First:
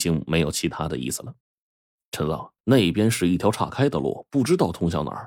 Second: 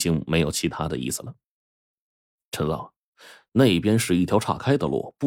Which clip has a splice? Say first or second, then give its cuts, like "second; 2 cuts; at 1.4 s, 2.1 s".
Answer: first; 2 cuts; at 1.4 s, 2.6 s